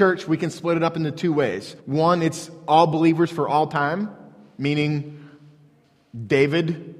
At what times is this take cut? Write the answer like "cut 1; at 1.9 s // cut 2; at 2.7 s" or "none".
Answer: cut 1; at 1.8 s